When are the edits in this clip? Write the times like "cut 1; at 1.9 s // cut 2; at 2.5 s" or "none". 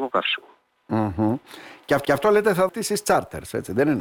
cut 1; at 2.0 s // cut 2; at 2.7 s